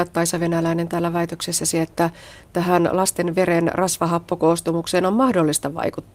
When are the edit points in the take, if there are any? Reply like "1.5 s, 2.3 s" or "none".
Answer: none

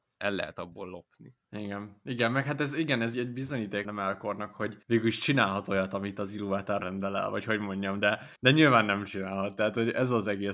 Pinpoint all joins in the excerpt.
1.4 s, 3.1 s, 3.8 s, 4.8 s, 6.8 s, 8.4 s

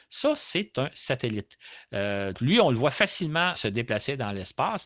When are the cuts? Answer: 2.3 s, 3.6 s

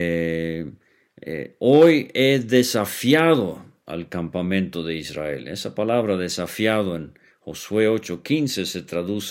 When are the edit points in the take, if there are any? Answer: none

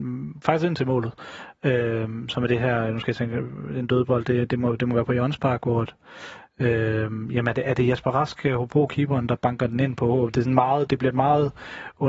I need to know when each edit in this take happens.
10.9 s

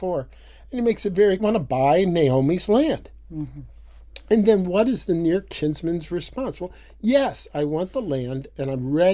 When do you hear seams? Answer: 1.4 s

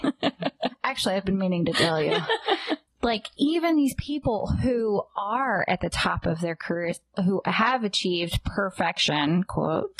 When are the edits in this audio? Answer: none

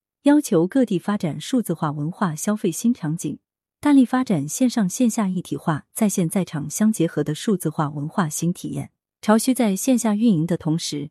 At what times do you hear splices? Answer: none

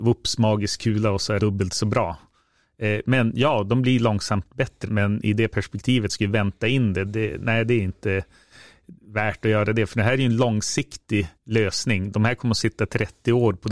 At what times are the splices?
1.4 s, 4.9 s, 6.1 s, 7.1 s, 9.0 s, 11.4 s

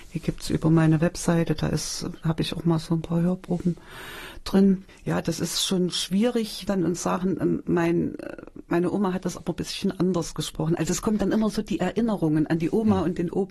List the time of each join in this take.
6.7 s

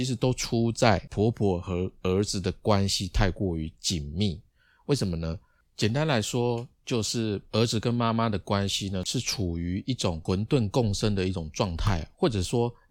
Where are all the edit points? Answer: none

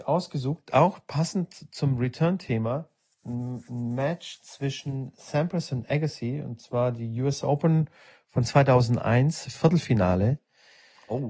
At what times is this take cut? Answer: none

